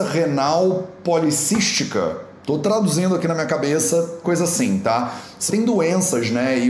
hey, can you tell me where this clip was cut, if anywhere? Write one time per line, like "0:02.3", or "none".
0:04.2
0:05.5